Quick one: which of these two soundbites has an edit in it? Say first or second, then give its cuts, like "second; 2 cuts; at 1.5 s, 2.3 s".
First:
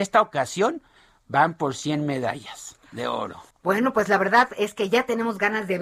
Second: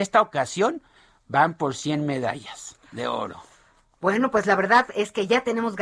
first; 1 cut; at 3.5 s